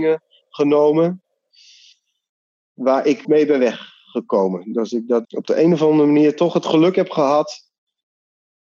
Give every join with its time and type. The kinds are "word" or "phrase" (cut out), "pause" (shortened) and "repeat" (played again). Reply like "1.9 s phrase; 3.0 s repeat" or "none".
3.2 s word; 5.2 s word